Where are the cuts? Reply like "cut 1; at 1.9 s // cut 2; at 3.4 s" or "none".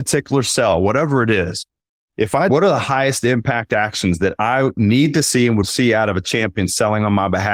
cut 1; at 2.5 s // cut 2; at 5.6 s